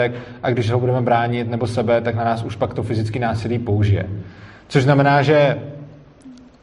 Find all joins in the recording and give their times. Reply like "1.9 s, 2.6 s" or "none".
none